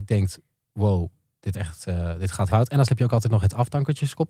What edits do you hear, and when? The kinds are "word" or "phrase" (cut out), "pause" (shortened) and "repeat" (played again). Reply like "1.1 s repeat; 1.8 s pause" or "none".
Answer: 1.5 s word; 2.5 s word; 2.9 s word